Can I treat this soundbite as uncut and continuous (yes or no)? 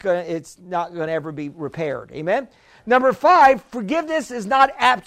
yes